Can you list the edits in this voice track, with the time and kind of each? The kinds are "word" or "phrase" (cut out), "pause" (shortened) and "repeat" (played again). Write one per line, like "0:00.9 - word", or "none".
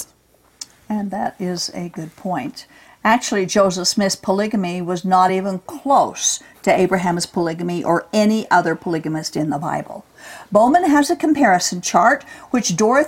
none